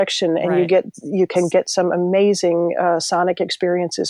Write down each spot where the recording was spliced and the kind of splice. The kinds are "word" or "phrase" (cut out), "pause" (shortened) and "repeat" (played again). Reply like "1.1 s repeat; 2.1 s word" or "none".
none